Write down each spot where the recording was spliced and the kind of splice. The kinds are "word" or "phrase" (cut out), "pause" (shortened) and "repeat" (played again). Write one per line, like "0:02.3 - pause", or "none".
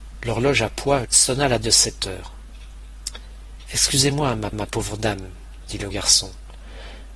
0:01.0 - phrase
0:01.6 - word
0:04.5 - repeat
0:05.9 - word

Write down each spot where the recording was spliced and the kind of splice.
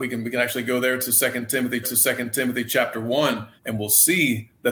0:01.8 - repeat
0:03.6 - pause

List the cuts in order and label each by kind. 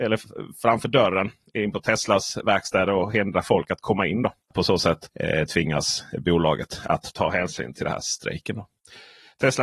0:04.4 - pause

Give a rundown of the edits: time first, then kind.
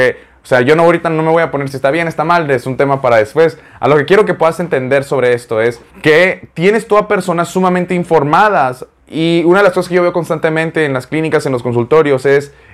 0:05.9 - pause
0:09.0 - pause

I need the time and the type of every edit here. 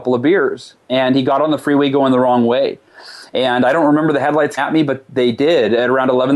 0:04.6 - word

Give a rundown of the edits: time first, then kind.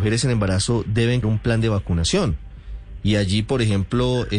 0:01.2 - word

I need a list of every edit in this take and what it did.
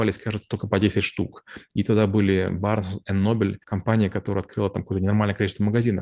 0:03.6 - pause

